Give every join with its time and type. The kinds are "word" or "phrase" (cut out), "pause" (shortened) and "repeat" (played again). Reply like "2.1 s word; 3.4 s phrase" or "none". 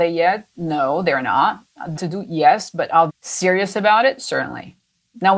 2.0 s phrase; 3.1 s word